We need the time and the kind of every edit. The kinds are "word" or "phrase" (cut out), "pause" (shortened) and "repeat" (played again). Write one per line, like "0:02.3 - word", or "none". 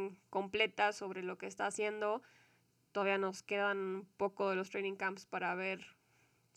none